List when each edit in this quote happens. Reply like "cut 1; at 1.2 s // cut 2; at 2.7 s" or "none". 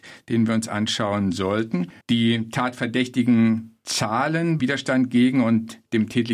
cut 1; at 2.0 s // cut 2; at 4.6 s